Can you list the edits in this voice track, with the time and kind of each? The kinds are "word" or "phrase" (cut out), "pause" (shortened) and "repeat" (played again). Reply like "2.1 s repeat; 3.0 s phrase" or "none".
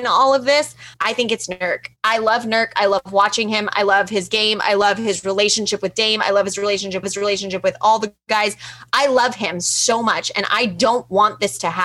0.9 s pause; 2.0 s pause; 7.0 s repeat